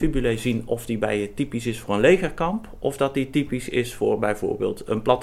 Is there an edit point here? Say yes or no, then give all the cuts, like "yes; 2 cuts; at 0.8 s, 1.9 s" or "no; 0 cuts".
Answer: no; 0 cuts